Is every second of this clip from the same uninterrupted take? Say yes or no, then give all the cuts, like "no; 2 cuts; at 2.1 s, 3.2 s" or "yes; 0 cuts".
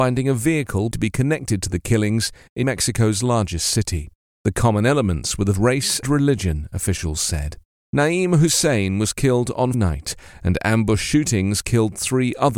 no; 5 cuts; at 0.9 s, 2.6 s, 5.5 s, 6.0 s, 9.7 s